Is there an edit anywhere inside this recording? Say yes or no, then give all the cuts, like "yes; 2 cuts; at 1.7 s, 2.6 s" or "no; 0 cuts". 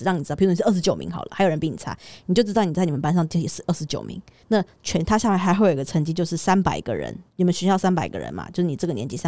yes; 2 cuts; at 4.4 s, 7.3 s